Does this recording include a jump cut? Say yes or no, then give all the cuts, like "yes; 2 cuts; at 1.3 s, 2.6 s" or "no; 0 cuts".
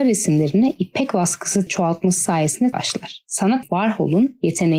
yes; 3 cuts; at 1.7 s, 2.7 s, 3.6 s